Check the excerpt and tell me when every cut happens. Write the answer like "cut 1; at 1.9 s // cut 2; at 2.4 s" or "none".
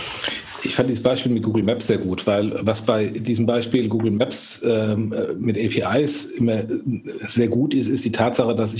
none